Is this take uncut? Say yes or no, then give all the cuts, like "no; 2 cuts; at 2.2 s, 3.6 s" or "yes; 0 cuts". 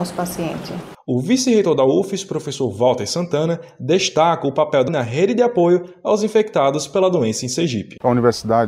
no; 1 cut; at 4.9 s